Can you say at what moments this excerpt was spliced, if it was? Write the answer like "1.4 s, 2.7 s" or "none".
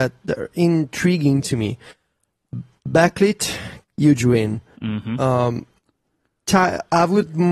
3.8 s